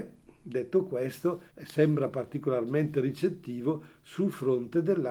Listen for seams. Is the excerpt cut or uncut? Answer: cut